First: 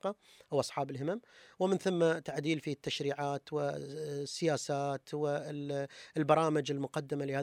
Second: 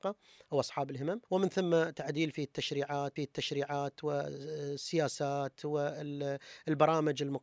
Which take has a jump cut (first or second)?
second